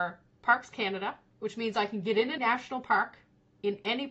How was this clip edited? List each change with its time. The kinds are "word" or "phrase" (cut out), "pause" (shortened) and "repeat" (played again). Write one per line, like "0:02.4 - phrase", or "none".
0:02.4 - phrase